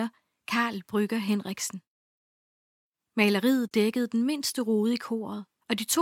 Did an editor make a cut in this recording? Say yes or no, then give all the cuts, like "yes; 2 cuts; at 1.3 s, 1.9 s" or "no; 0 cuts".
no; 0 cuts